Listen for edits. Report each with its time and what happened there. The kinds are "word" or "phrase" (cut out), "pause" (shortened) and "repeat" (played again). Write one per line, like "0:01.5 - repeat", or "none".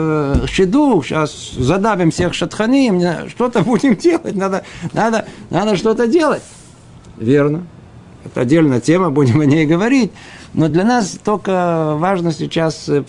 none